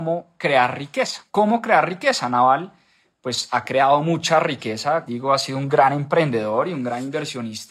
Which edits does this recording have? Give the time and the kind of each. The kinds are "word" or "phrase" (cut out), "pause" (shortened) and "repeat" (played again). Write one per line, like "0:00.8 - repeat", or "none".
0:01.3 - pause
0:05.1 - phrase